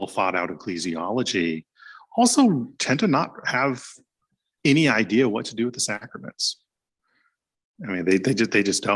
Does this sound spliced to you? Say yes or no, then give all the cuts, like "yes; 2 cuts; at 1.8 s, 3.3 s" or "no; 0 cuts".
no; 0 cuts